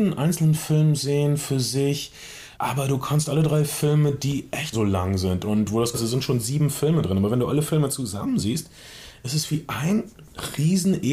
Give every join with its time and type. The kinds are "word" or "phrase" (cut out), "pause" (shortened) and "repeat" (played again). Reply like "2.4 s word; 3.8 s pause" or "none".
2.5 s pause; 4.7 s word; 5.9 s word

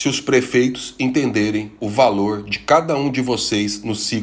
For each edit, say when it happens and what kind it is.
none

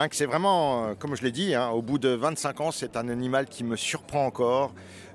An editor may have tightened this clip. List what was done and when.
none

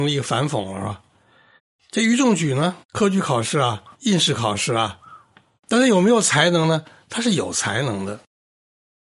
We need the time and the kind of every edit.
1.6 s pause; 2.8 s pause; 3.9 s pause; 5.6 s phrase

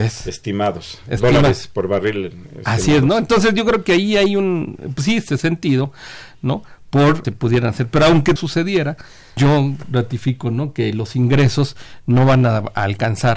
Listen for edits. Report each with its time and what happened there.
5.3 s phrase; 7.2 s phrase; 8.4 s phrase; 9.4 s word

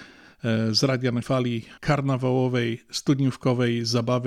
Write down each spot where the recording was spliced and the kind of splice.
1.2 s word; 1.8 s word

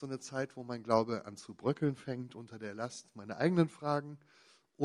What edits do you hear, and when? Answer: none

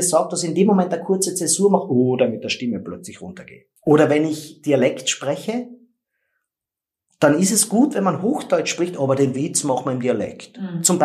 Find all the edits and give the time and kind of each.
3.8 s pause

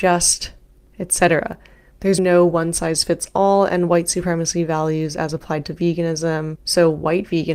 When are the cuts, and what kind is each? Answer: 2.2 s word

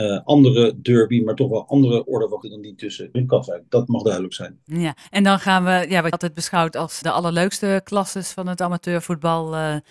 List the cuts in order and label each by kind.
2.4 s word; 3.1 s phrase; 5.0 s pause; 6.1 s word; 7.0 s word

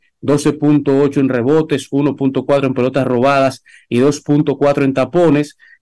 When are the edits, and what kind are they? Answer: none

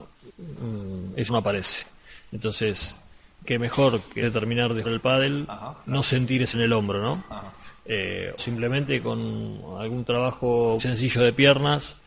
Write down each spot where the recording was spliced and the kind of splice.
1.3 s word; 3.4 s word; 4.2 s word; 4.8 s word; 5.8 s word; 6.5 s word; 8.4 s word; 10.8 s word

